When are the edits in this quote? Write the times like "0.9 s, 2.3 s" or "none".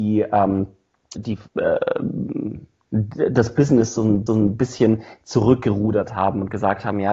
1.2 s, 1.5 s, 4.3 s